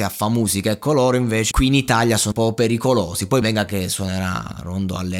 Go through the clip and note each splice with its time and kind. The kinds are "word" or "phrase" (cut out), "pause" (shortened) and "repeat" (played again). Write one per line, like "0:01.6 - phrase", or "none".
0:01.5 - word
0:02.3 - word
0:03.4 - word